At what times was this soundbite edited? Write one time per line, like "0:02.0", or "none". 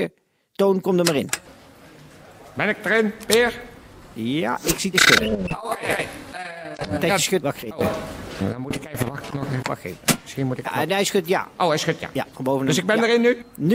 0:04.9
0:07.4
0:10.6